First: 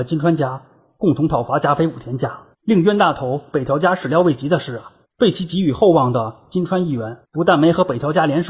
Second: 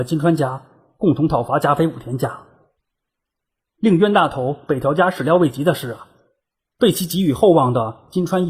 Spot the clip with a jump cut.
first; 3 cuts; at 2.5 s, 5.0 s, 7.2 s

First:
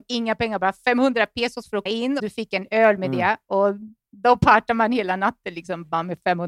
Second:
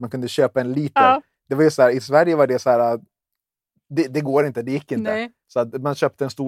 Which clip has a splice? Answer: first; 2 cuts; at 1.9 s, 2.2 s

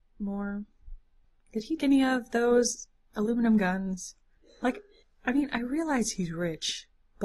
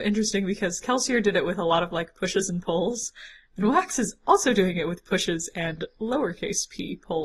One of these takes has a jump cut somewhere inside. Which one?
first; 1 cut; at 1.8 s

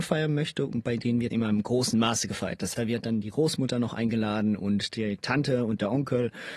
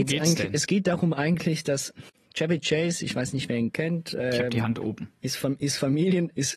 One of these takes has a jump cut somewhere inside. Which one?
first; 2 cuts; at 1.3 s, 2.7 s

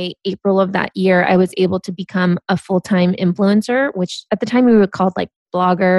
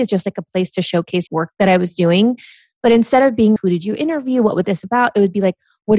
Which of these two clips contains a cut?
second; 2 cuts; at 1.3 s, 3.6 s

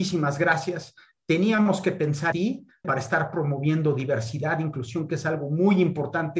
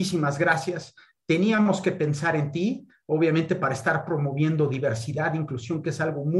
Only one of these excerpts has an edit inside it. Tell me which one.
first; 2 cuts; at 2.3 s, 2.8 s

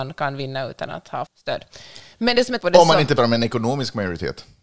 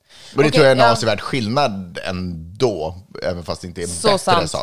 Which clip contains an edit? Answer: first; 3 cuts; at 1.3 s, 2.6 s, 3.2 s

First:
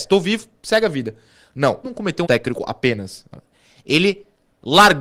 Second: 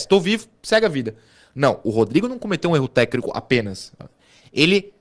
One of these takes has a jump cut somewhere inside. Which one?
first; 2 cuts; at 1.8 s, 2.2 s

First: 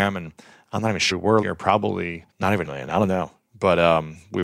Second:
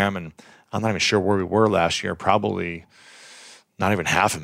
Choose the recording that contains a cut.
first; 4 cuts; at 1.1 s, 1.4 s, 2.3 s, 2.6 s

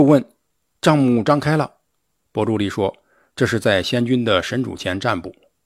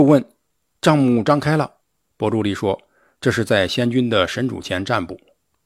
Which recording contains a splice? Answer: second; 1 cut; at 1.8 s

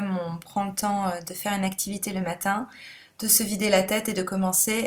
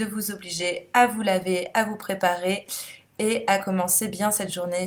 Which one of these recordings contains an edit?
first; 1 cut; at 1.2 s

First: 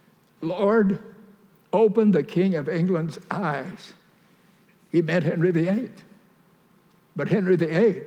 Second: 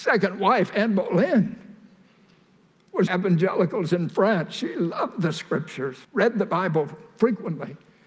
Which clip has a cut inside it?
second; 2 cuts; at 3.1 s, 6.0 s

